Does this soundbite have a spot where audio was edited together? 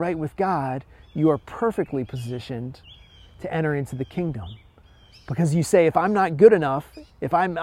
no; 0 cuts

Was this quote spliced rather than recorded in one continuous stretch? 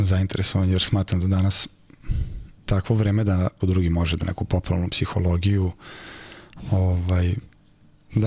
yes; 3 cuts; at 2.6 s, 3.6 s, 4.2 s

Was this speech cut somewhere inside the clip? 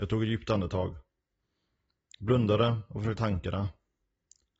yes; 1 cut; at 3.2 s

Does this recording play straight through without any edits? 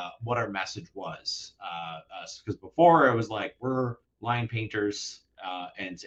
no; 1 cut; at 4.0 s

